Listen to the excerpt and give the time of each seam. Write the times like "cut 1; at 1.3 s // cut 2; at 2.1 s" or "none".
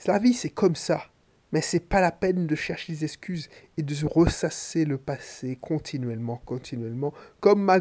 none